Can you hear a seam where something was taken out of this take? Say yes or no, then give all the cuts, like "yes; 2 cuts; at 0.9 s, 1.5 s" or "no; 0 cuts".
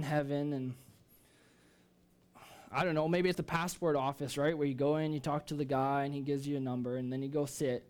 yes; 1 cut; at 3.3 s